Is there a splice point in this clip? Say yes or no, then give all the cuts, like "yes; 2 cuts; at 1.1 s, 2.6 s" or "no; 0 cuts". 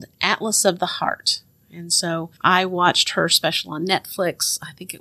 no; 0 cuts